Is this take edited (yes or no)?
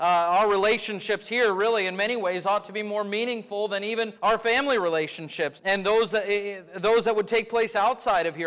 yes